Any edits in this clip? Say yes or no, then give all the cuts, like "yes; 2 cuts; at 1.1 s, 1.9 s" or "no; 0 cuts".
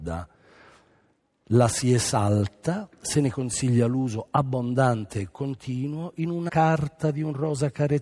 yes; 1 cut; at 6.5 s